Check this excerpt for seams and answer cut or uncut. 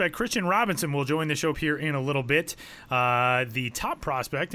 cut